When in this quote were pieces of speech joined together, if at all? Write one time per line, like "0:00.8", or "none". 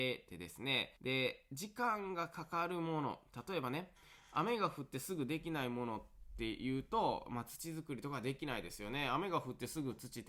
0:01.0